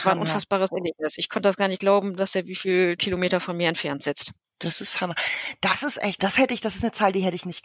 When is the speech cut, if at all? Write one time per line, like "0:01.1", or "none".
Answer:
0:03.0
0:06.2